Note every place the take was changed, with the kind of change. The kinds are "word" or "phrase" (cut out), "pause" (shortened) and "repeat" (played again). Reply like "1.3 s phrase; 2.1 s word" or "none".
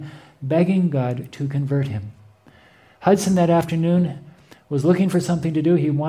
none